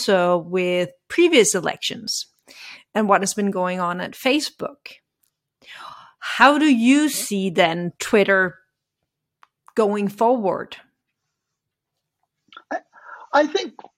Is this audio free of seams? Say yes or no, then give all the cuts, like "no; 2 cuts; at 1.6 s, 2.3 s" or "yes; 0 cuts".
yes; 0 cuts